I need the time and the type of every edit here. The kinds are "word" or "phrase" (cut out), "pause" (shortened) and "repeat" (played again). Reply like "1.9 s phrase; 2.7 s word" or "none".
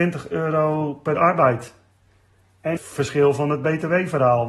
1.2 s word; 2.8 s word